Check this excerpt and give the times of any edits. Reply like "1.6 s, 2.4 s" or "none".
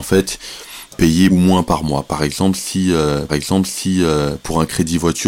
0.9 s, 1.3 s, 3.3 s